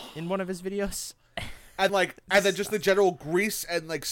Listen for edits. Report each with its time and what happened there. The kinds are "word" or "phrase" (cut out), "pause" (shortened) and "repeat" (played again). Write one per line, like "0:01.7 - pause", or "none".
0:01.9 - word